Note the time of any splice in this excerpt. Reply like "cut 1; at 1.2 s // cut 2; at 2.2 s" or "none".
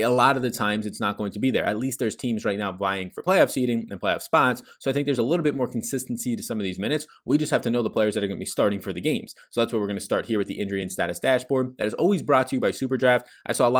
none